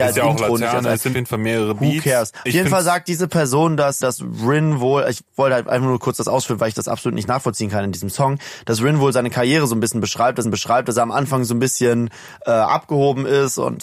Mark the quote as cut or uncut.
cut